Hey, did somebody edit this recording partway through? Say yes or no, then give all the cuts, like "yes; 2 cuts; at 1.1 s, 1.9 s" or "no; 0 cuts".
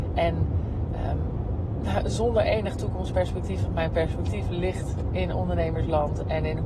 no; 0 cuts